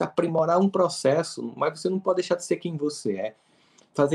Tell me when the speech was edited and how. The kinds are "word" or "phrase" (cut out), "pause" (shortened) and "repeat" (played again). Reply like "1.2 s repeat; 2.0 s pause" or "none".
none